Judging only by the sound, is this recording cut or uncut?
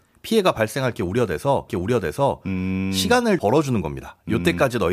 cut